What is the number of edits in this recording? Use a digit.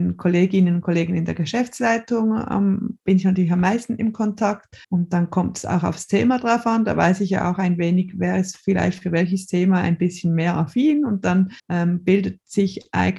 2